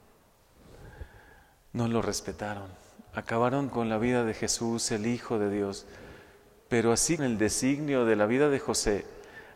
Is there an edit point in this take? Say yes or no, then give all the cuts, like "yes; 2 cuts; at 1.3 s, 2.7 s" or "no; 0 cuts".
yes; 2 cuts; at 3.7 s, 7.2 s